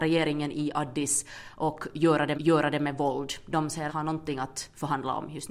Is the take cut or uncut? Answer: cut